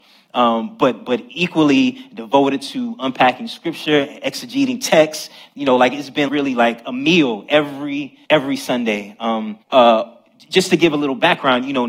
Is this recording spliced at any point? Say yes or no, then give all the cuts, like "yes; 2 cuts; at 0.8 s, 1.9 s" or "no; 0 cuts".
yes; 3 cuts; at 6.3 s, 8.2 s, 9.6 s